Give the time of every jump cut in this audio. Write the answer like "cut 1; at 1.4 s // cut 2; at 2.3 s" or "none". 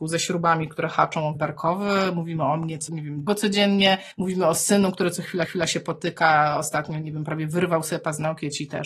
cut 1; at 1.3 s // cut 2; at 2.9 s // cut 3; at 3.3 s // cut 4; at 4.1 s // cut 5; at 5.4 s